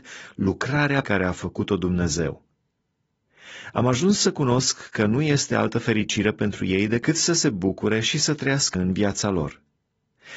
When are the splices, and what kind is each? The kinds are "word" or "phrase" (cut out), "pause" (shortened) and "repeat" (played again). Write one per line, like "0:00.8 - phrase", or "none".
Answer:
0:01.0 - word
0:08.7 - word